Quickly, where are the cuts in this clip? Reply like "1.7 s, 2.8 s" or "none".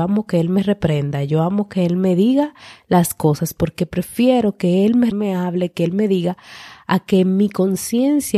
5.1 s